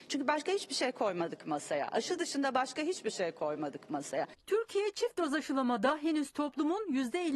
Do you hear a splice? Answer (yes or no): no